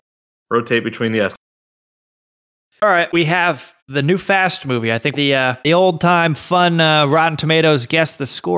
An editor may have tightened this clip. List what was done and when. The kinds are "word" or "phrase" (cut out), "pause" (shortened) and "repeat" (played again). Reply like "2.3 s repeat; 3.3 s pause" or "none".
1.3 s word; 3.1 s phrase; 3.8 s pause; 5.1 s phrase; 5.6 s pause